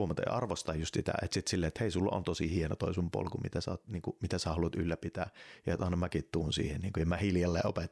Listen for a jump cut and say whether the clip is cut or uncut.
uncut